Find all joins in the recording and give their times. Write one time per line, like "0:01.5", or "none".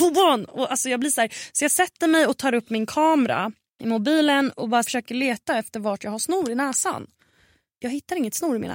0:04.8